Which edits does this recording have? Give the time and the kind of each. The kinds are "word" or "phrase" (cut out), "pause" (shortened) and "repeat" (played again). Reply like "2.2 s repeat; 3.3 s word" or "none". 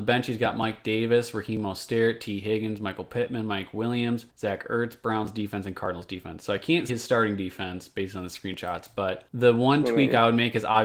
4.3 s pause; 6.9 s word; 9.3 s pause